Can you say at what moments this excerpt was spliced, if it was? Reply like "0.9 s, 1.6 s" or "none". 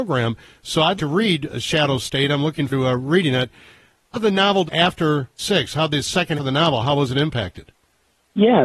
1.0 s, 2.7 s, 4.1 s, 4.7 s, 5.4 s, 6.4 s